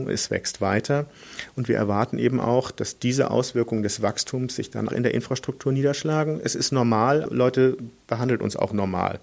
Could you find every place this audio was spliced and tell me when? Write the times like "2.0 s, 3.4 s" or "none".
4.9 s, 7.3 s